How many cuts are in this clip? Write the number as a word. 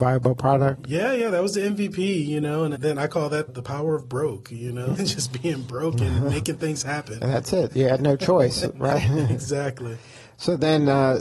three